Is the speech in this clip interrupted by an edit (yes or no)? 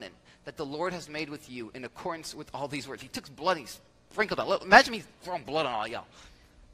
no